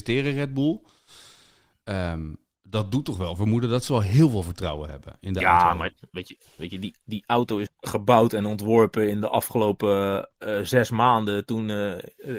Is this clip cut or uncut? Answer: cut